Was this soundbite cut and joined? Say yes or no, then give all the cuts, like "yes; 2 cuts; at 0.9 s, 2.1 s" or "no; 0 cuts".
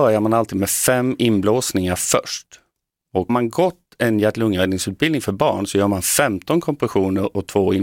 yes; 1 cut; at 3.3 s